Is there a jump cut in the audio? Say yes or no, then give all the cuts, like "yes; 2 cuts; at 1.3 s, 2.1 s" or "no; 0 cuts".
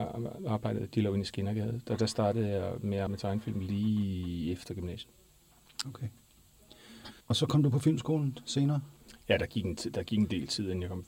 yes; 2 cuts; at 3.1 s, 7.2 s